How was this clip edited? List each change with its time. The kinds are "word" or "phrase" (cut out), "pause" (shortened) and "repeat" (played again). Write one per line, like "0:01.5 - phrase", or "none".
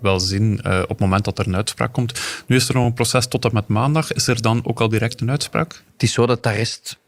none